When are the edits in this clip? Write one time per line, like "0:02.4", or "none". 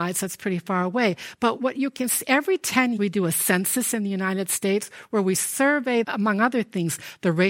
0:01.6
0:03.0
0:06.0